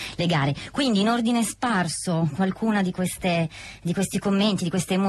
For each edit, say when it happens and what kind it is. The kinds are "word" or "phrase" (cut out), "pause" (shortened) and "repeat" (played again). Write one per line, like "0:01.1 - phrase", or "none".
none